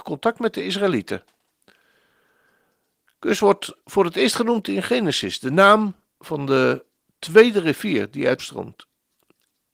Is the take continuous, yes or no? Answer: no